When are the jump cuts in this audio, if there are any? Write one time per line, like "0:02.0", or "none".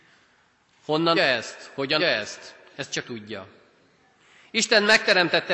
0:01.2
0:02.0
0:03.0